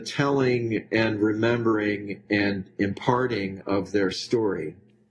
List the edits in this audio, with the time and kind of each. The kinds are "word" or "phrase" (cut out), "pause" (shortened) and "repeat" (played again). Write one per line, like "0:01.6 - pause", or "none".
none